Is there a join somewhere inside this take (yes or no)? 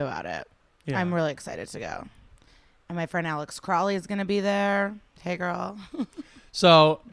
no